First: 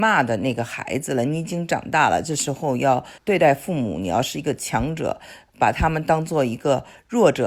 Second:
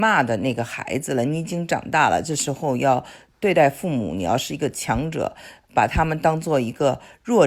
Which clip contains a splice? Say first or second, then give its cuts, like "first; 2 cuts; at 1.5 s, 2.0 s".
first; 1 cut; at 3.2 s